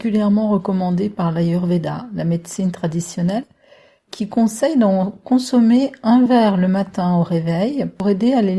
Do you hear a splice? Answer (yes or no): no